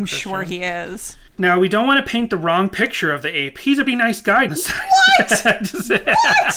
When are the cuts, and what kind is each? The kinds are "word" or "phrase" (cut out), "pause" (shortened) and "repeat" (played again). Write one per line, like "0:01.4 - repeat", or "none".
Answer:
0:01.3 - pause
0:03.9 - word
0:04.5 - word

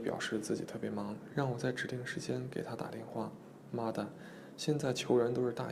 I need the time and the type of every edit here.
0:01.3 - phrase

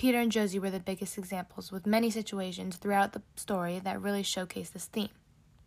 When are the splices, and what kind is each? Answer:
none

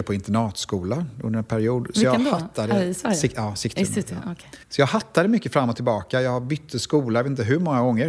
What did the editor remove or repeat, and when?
0:04.6 - pause

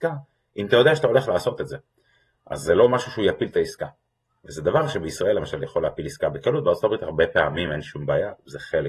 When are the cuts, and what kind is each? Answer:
none

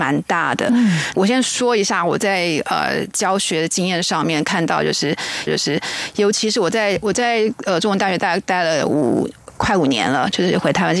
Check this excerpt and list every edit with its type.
0:05.5 - repeat

